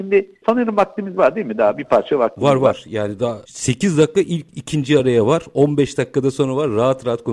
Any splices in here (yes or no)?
no